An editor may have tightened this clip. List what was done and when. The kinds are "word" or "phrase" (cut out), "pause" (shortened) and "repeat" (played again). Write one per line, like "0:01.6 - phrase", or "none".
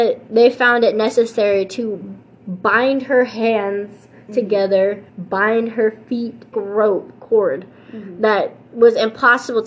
0:05.1 - pause
0:06.5 - phrase